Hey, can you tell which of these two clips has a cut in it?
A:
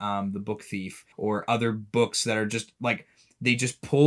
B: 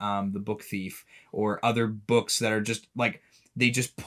A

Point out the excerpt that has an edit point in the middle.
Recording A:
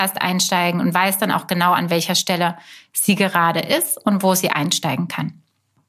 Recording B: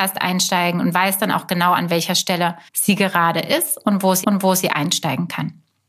B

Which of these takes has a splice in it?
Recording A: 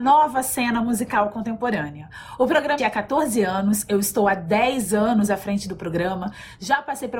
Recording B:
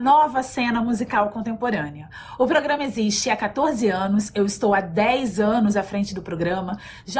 A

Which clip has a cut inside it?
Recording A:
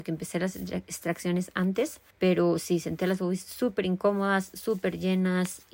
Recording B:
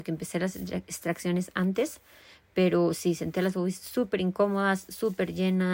A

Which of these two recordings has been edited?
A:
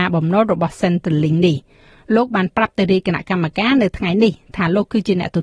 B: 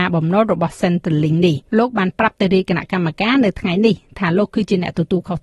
B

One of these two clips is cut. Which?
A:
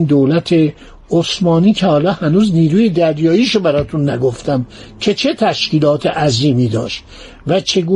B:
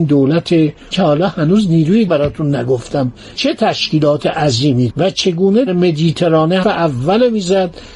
B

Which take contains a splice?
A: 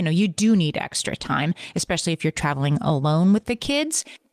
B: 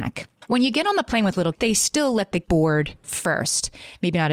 B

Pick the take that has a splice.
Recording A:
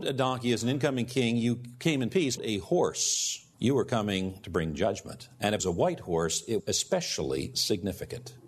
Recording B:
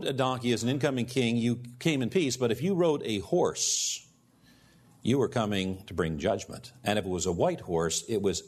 A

